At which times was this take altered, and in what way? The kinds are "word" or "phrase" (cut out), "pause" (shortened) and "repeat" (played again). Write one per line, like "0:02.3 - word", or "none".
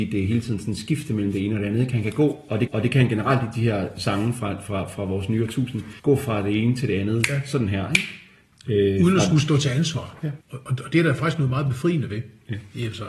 0:02.7 - repeat
0:06.0 - pause
0:10.4 - pause